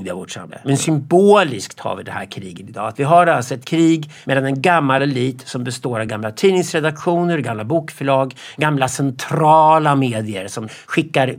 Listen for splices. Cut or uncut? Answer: uncut